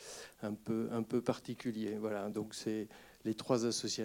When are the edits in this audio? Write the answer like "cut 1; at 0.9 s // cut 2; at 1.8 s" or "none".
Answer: none